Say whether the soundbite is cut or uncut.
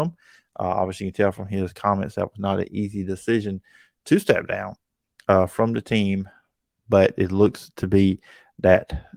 uncut